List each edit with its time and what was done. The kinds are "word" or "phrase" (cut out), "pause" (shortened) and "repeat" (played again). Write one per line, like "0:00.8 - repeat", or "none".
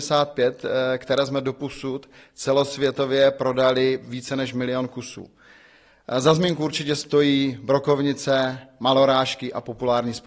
none